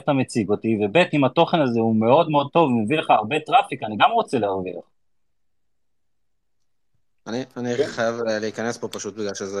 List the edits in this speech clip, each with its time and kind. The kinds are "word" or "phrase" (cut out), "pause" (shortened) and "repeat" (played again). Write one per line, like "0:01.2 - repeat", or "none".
none